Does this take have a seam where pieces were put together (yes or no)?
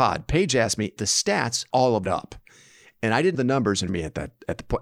yes